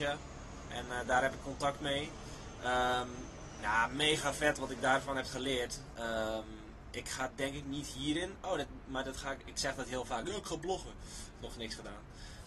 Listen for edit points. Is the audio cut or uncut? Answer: uncut